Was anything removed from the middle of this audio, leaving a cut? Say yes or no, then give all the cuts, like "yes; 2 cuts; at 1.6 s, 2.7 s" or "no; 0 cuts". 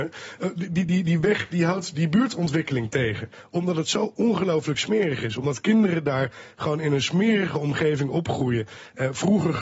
no; 0 cuts